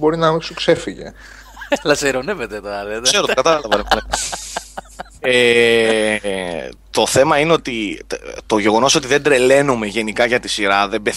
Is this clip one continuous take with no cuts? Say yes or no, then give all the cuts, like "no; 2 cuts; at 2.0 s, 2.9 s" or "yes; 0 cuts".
yes; 0 cuts